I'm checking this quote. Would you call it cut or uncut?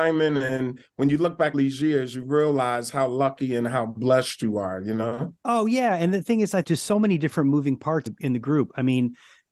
cut